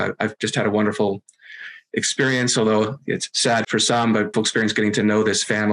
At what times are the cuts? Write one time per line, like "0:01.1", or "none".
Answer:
0:03.6
0:04.3